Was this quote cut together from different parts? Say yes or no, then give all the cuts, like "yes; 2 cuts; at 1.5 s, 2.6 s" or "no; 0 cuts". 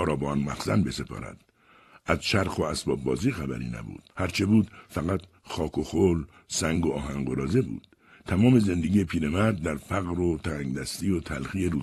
yes; 1 cut; at 4.1 s